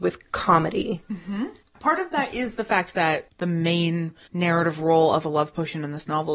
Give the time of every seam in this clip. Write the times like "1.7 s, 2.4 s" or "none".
none